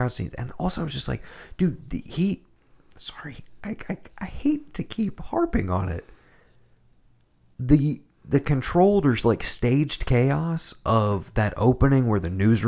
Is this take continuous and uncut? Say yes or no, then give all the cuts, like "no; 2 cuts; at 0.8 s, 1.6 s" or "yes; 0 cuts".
yes; 0 cuts